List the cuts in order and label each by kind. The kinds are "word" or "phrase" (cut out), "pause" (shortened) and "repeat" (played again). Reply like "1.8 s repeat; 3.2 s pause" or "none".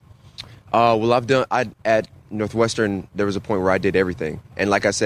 1.8 s pause